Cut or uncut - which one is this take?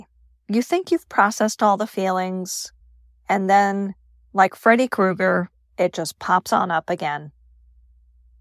uncut